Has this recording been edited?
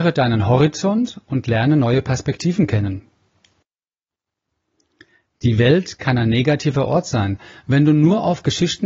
no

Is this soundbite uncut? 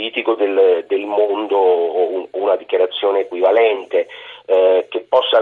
yes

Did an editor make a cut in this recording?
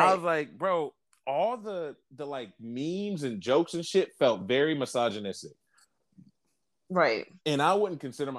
no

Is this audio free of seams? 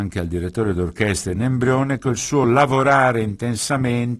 yes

